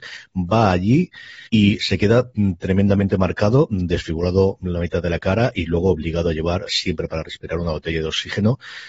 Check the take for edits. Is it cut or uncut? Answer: cut